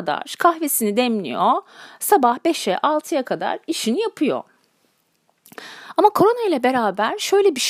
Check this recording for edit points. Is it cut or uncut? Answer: uncut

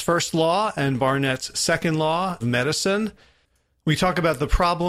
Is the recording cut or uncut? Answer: cut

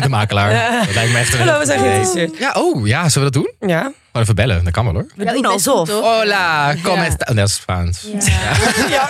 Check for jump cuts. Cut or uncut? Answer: cut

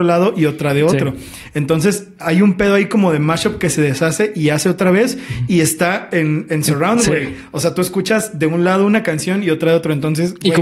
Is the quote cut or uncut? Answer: uncut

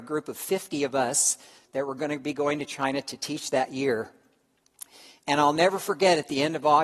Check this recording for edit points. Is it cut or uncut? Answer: uncut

